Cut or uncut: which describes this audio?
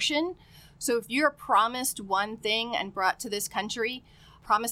uncut